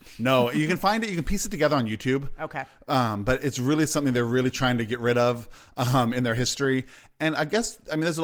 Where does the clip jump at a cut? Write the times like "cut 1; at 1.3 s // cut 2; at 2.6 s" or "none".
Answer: none

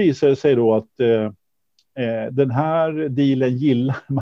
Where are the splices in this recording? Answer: none

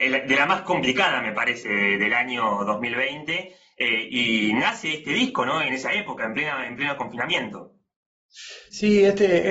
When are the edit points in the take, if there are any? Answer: cut 1; at 5.7 s

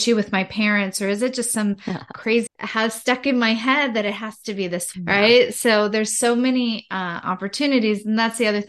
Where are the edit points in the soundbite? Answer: cut 1; at 2.5 s // cut 2; at 4.9 s

